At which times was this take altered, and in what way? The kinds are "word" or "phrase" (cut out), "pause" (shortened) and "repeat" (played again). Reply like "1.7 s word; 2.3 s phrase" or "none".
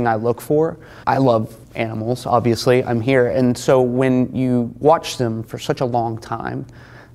1.0 s pause; 1.6 s pause